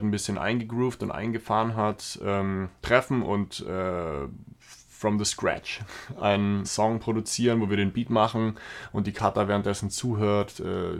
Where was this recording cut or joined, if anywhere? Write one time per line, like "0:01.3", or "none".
0:02.8
0:06.6